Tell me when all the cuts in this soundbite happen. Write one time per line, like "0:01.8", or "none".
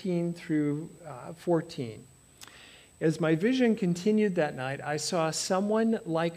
none